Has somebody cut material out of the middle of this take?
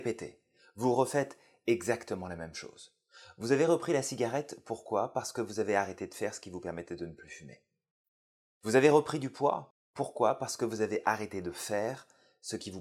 no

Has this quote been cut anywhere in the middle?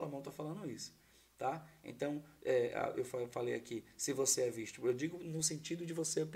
no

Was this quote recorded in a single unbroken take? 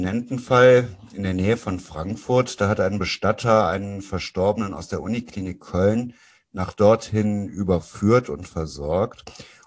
yes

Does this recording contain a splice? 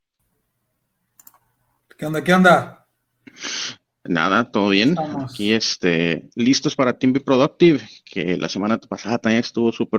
no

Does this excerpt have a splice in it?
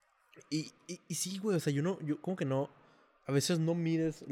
no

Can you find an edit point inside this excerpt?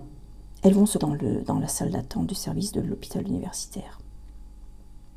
yes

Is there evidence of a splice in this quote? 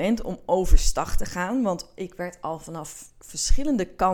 no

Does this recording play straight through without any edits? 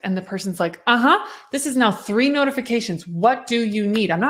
yes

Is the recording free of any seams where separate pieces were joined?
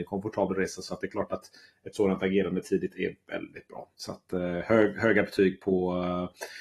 yes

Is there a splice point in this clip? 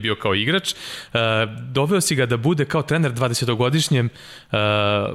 no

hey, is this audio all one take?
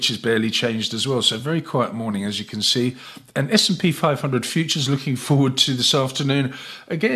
yes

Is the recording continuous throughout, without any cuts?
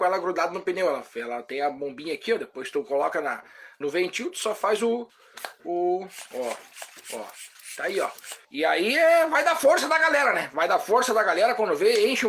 no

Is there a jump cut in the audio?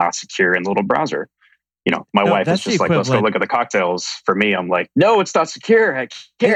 no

